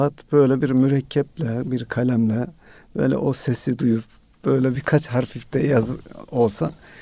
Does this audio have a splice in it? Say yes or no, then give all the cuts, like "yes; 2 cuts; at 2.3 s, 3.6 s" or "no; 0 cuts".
no; 0 cuts